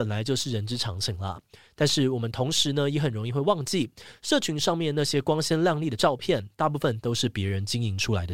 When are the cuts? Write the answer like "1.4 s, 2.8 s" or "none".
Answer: none